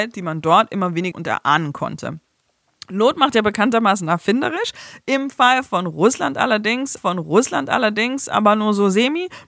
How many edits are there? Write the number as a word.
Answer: two